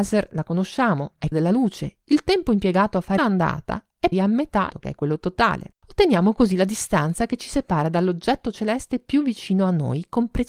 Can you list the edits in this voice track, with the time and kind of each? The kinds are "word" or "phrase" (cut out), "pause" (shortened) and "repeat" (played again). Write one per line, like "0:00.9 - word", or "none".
0:01.3 - word
0:03.2 - phrase
0:04.1 - word
0:04.7 - phrase
0:05.8 - pause